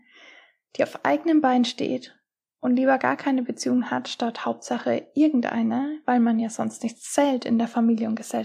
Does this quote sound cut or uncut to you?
uncut